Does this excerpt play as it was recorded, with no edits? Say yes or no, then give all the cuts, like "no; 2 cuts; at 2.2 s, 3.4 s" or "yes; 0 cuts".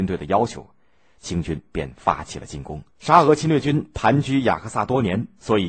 no; 1 cut; at 2.9 s